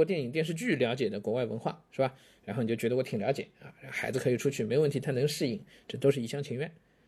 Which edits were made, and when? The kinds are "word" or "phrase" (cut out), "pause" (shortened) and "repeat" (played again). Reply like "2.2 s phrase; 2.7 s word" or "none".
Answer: none